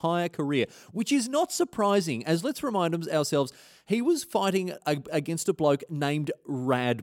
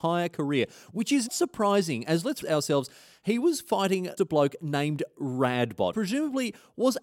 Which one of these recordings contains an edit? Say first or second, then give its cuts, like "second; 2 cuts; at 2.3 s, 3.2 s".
second; 4 cuts; at 1.3 s, 2.4 s, 4.2 s, 5.9 s